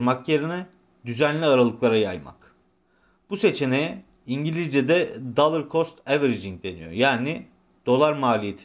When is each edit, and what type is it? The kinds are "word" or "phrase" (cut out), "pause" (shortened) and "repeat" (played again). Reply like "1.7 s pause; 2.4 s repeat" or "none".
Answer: none

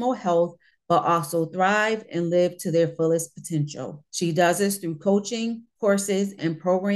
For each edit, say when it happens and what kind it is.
4.1 s pause

